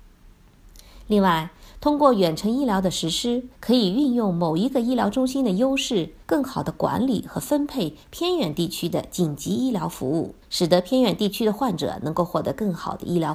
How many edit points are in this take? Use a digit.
3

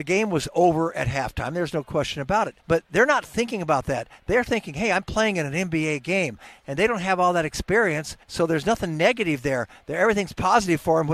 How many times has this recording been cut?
2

